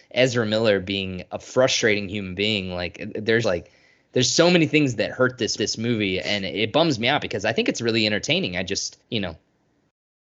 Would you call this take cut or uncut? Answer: cut